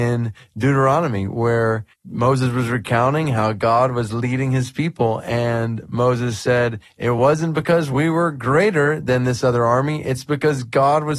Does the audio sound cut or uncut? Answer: cut